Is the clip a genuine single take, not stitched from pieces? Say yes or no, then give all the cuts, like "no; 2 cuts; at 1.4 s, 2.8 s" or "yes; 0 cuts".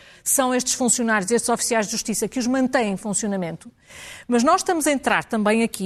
yes; 0 cuts